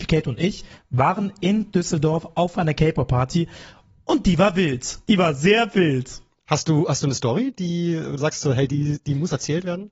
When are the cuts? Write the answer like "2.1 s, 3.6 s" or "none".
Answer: none